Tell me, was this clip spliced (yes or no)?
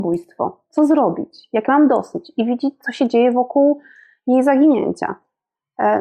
no